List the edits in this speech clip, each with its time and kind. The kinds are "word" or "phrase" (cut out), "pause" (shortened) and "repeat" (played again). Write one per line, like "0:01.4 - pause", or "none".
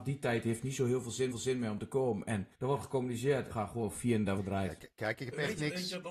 0:01.3 - repeat
0:02.5 - pause
0:03.5 - word
0:04.4 - phrase
0:04.9 - pause